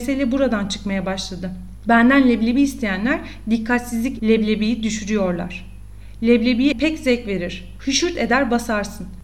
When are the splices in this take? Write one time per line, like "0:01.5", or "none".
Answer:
0:04.2
0:06.7